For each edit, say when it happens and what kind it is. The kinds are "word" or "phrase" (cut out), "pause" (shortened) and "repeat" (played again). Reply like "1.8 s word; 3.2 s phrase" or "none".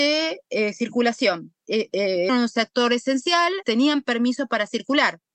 2.3 s word; 3.6 s word